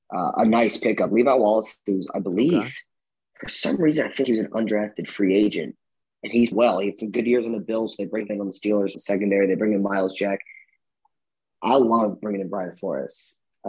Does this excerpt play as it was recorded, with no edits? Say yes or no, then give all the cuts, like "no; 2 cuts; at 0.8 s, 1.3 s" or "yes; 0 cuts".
no; 4 cuts; at 4.2 s, 6.5 s, 8.3 s, 8.9 s